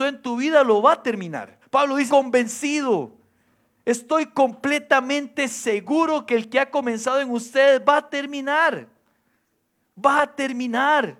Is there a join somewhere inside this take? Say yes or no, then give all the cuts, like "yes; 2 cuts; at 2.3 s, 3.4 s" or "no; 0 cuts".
yes; 2 cuts; at 1.6 s, 2.1 s